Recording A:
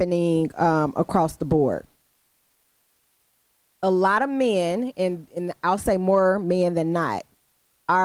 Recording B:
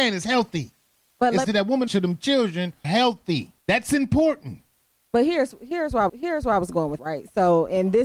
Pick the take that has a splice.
B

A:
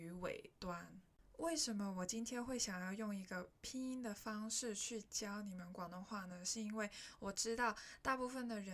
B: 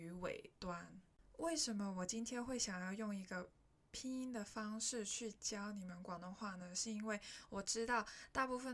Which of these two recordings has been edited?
A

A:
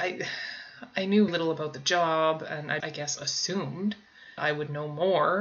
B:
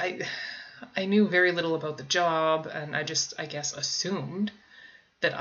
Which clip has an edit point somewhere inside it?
A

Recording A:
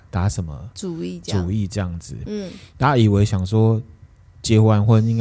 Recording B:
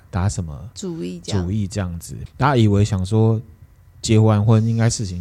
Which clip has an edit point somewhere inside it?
B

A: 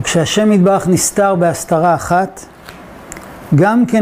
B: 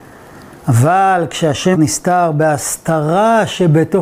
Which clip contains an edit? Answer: B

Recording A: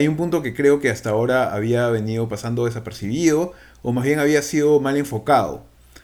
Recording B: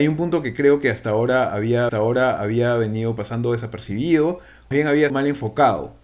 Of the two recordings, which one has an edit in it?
B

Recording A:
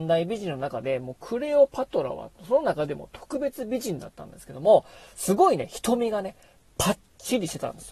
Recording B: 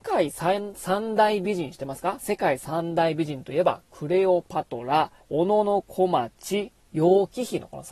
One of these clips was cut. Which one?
B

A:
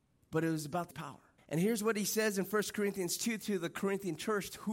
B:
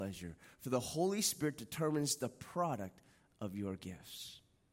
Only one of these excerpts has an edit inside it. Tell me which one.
A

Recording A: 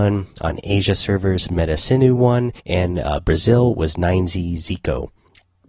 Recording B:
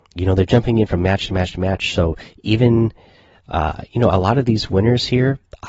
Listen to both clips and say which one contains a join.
A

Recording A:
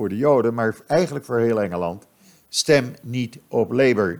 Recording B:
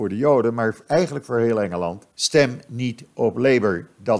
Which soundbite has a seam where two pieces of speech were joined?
B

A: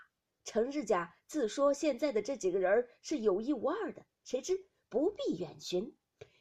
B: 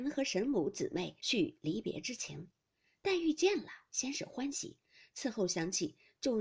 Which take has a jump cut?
B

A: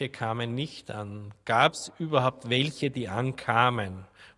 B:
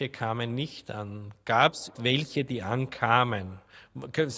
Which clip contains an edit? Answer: B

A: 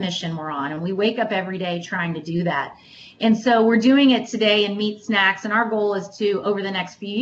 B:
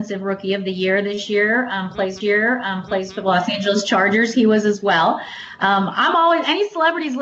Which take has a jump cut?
B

